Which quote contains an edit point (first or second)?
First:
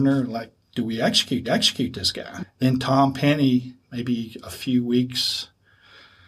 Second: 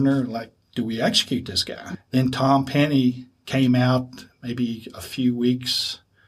first